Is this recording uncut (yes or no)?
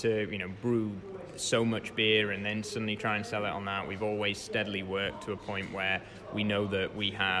yes